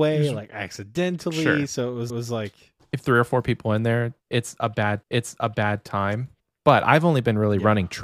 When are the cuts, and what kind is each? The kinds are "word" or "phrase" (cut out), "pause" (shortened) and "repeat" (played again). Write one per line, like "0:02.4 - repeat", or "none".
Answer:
0:02.1 - repeat
0:03.0 - phrase
0:05.0 - repeat